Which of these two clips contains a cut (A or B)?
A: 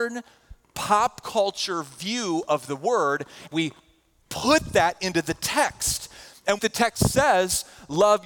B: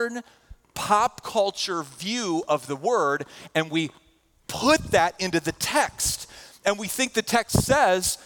A